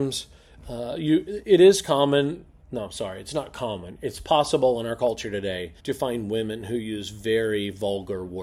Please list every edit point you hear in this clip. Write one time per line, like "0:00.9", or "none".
0:05.8